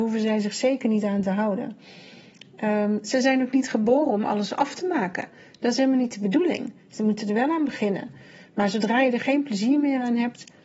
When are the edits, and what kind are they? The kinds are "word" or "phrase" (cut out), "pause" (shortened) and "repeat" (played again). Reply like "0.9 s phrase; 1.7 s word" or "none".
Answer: none